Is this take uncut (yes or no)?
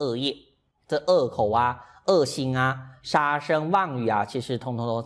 yes